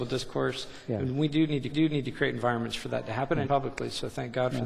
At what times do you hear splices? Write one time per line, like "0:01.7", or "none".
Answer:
0:01.7
0:03.5